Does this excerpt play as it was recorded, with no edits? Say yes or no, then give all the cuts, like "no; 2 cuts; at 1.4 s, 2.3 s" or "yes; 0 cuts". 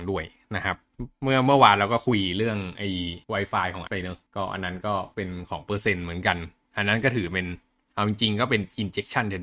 no; 3 cuts; at 3.2 s, 3.9 s, 4.3 s